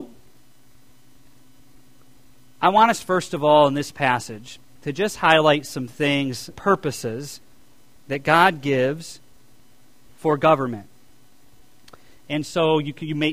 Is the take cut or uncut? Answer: cut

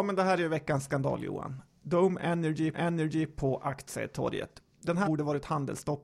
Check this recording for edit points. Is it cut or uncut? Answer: cut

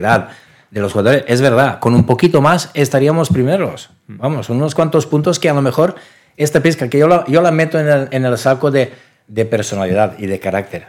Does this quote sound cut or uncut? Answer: uncut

